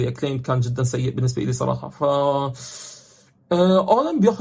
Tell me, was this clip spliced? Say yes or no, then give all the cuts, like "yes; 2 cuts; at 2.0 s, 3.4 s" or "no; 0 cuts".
no; 0 cuts